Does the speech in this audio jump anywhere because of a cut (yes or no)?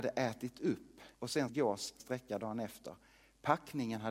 yes